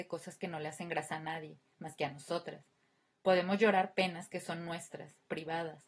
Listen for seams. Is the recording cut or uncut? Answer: uncut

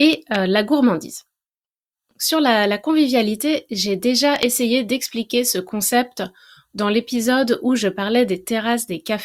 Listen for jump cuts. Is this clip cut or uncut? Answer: uncut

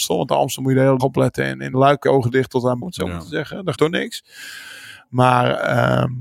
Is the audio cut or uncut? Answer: cut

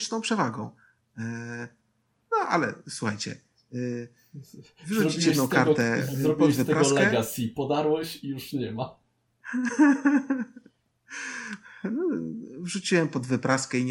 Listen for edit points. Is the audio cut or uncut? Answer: uncut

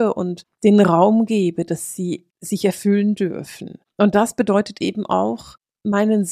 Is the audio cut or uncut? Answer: uncut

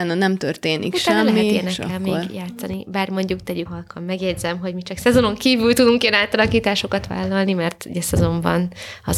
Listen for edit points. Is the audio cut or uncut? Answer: cut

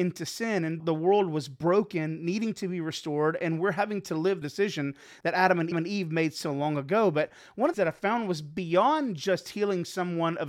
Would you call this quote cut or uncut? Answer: cut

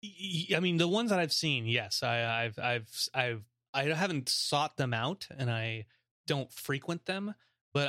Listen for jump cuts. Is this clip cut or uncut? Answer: uncut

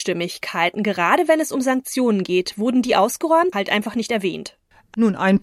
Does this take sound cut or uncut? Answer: cut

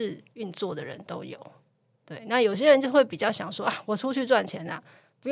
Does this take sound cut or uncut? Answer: uncut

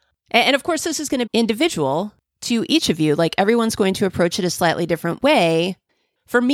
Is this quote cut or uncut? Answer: cut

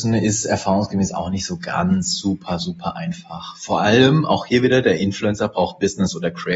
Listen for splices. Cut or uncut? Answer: uncut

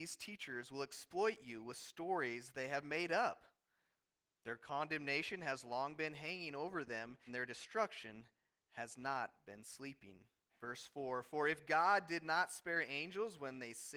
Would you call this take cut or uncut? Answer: cut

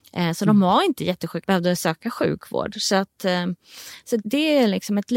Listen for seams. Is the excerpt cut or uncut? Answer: cut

